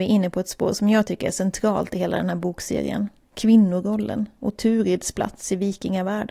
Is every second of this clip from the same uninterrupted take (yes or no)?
yes